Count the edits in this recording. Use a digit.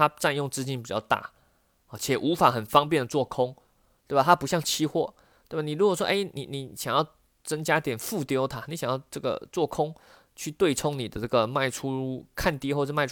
0